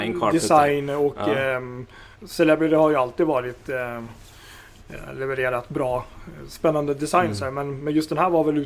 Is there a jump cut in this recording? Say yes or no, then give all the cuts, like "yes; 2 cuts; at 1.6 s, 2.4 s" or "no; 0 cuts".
yes; 1 cut; at 2.1 s